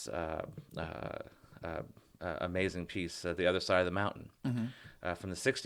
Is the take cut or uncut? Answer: uncut